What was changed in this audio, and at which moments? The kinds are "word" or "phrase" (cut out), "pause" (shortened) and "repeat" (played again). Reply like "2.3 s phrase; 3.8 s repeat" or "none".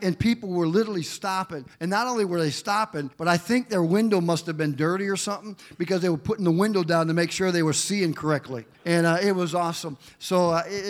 1.7 s pause; 3.1 s pause; 8.7 s pause